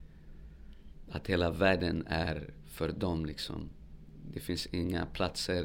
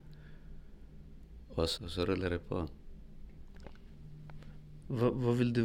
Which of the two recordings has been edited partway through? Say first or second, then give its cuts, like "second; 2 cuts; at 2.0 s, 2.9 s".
second; 1 cut; at 1.8 s